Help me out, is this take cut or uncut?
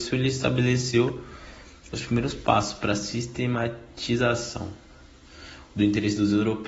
uncut